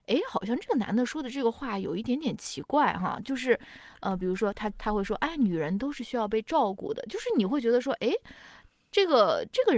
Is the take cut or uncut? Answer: uncut